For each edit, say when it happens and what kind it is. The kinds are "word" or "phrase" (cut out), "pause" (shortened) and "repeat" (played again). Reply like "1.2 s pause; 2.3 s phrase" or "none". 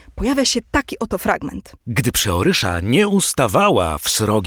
1.8 s pause